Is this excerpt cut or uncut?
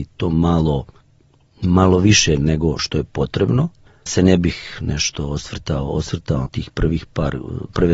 cut